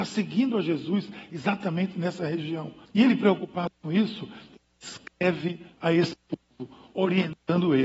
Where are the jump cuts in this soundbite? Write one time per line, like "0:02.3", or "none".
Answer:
0:02.9
0:05.7